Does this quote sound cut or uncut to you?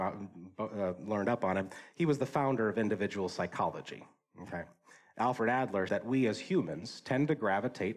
cut